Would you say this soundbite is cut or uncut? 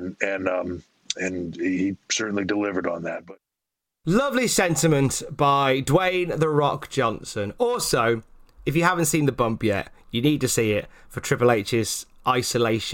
uncut